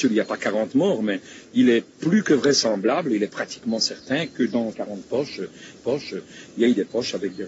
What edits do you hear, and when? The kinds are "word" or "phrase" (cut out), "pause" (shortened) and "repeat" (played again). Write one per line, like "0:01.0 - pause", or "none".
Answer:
0:04.7 - word
0:05.8 - repeat